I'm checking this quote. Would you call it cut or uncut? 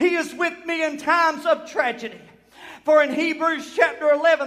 uncut